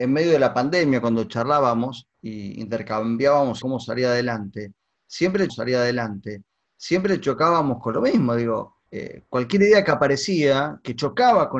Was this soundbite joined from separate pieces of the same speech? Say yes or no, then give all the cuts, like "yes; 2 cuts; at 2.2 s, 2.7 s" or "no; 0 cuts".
yes; 4 cuts; at 2.1 s, 3.6 s, 5.5 s, 8.9 s